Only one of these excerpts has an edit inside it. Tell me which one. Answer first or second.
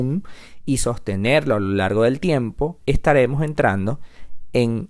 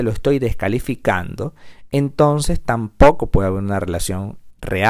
first